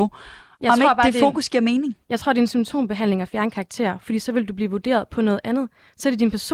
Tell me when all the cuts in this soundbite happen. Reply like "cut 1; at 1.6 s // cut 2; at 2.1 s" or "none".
none